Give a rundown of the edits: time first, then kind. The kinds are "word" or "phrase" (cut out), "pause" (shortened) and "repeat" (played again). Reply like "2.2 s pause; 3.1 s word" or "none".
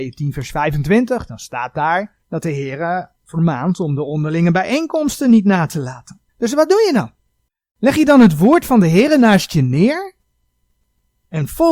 2.2 s pause; 3.2 s pause; 6.3 s pause; 7.5 s pause